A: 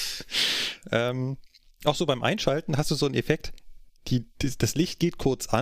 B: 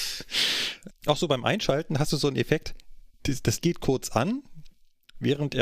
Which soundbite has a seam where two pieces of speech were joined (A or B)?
B